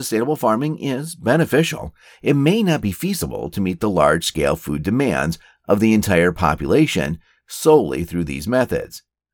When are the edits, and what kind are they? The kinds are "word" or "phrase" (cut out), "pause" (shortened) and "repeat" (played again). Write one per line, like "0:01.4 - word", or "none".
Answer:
none